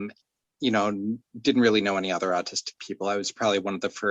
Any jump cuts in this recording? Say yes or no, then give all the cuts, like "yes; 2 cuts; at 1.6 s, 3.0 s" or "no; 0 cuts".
no; 0 cuts